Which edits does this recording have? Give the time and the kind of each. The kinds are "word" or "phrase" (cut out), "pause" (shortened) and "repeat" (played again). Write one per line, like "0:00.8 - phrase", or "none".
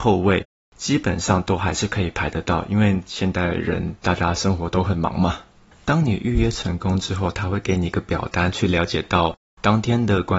none